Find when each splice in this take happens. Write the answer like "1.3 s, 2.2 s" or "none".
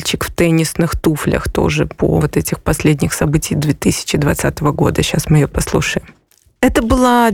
2.2 s